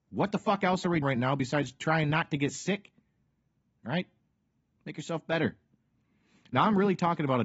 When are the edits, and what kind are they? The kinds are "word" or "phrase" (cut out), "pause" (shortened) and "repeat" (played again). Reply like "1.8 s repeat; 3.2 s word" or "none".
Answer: 1.0 s word